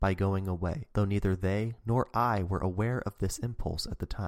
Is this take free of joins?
no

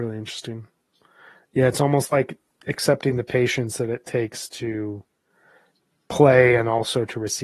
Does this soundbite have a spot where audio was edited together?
no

